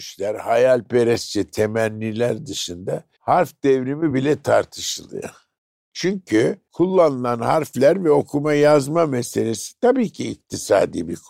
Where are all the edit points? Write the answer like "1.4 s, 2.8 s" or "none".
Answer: none